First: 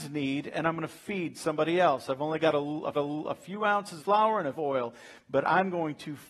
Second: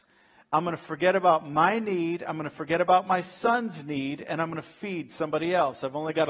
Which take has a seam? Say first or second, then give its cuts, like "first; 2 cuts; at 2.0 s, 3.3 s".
first; 3 cuts; at 2.9 s, 4.0 s, 4.6 s